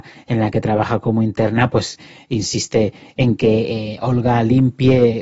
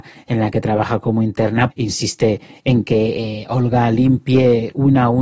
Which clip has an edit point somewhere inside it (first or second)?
second